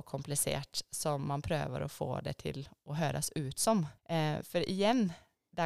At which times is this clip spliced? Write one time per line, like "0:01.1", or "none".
0:04.0